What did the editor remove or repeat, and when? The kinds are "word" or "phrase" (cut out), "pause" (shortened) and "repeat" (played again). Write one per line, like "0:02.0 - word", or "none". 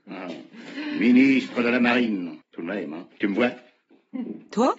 0:02.4 - pause
0:03.1 - pause

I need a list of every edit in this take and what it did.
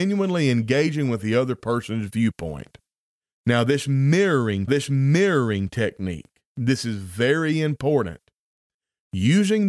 0:04.7 - repeat

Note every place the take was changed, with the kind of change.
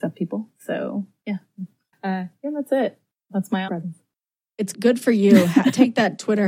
0:01.9 - word
0:03.7 - word
0:04.7 - word

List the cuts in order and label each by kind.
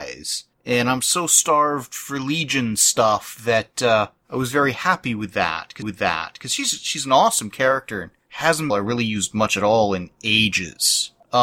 0:05.8 - repeat
0:08.7 - phrase

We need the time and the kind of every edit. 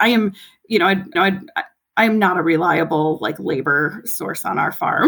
0:01.2 - repeat

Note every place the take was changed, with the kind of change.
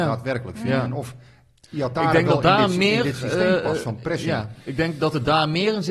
none

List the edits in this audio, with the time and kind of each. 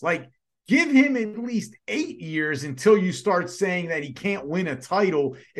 none

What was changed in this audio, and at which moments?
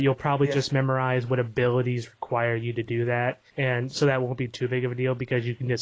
0:03.5 - pause

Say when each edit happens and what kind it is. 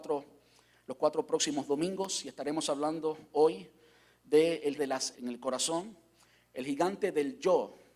0:04.8 - word
0:05.1 - word

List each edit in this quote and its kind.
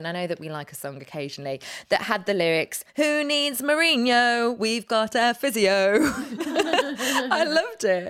0:02.9 - pause

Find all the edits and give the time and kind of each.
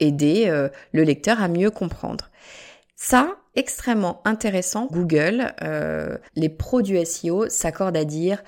0:03.5 - word
0:04.9 - word
0:06.3 - pause

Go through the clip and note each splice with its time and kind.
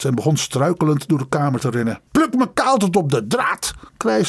0:02.1 - pause

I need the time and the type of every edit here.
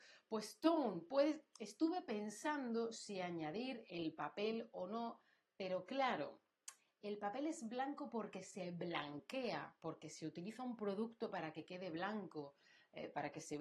none

